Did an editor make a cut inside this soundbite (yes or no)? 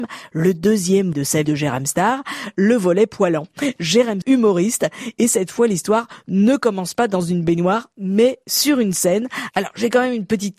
yes